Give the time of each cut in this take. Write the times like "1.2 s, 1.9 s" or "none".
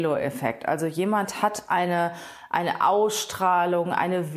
none